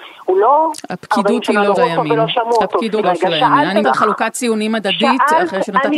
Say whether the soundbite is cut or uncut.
cut